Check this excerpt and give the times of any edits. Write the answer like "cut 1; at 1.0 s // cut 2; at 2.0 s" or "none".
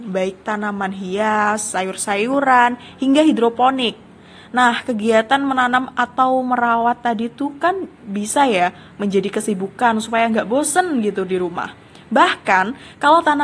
none